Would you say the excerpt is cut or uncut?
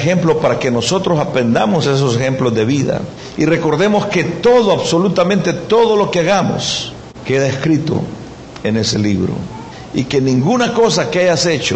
uncut